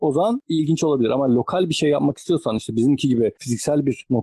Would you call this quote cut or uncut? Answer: uncut